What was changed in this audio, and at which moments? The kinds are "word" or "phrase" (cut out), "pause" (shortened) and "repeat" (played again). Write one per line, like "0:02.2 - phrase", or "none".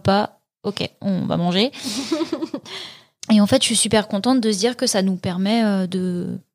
none